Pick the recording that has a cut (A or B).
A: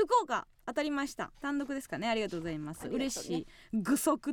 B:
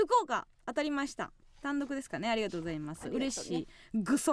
A